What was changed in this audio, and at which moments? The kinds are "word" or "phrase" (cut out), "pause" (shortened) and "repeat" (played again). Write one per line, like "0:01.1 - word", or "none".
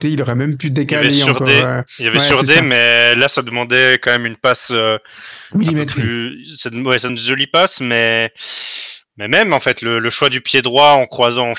0:07.1 - word